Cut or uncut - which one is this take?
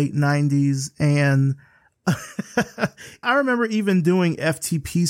uncut